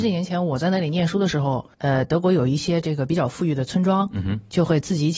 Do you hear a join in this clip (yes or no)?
yes